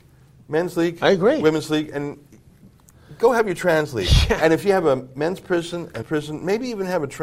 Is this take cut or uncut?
cut